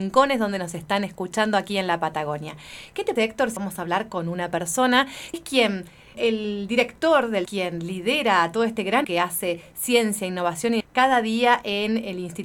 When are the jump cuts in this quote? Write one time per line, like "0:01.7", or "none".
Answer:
0:03.2
0:03.6
0:05.3
0:06.1
0:07.5
0:09.0
0:10.8